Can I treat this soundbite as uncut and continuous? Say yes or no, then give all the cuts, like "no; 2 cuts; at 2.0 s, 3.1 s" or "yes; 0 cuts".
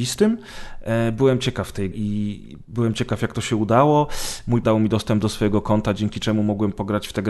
no; 2 cuts; at 1.9 s, 4.6 s